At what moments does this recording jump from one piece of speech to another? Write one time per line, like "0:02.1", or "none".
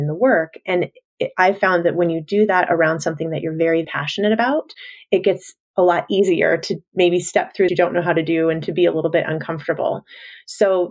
0:03.8
0:05.6
0:07.7